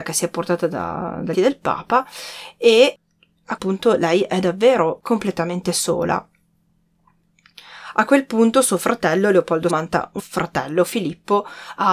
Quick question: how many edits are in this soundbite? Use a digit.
4